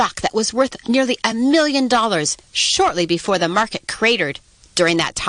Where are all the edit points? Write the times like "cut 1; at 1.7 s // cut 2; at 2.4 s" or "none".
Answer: none